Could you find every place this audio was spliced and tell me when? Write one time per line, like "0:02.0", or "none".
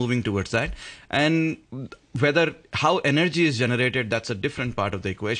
none